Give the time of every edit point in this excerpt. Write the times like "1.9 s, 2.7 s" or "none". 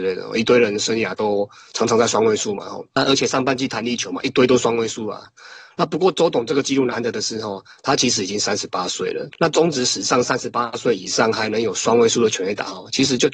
9.3 s